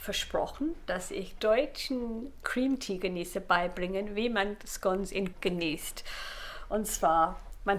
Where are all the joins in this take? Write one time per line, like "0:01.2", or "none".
0:01.4
0:05.3